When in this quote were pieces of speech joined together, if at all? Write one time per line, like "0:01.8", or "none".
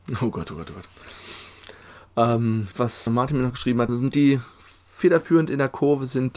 0:02.7
0:03.1
0:03.9